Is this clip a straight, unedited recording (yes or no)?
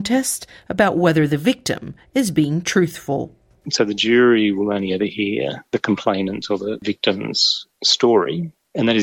yes